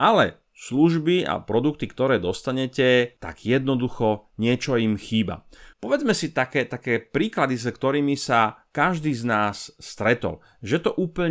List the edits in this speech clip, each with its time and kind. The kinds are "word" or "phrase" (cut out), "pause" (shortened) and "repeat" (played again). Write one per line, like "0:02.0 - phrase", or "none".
0:03.2 - pause
0:05.7 - pause